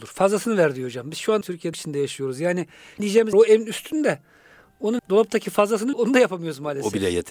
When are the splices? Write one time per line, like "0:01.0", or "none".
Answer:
0:01.4
0:01.7
0:03.0
0:03.3
0:05.0
0:05.9